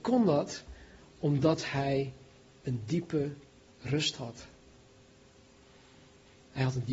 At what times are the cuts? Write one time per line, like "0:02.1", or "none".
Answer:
none